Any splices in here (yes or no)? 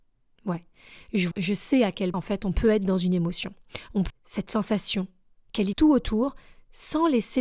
yes